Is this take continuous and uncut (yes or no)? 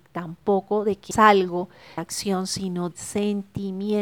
no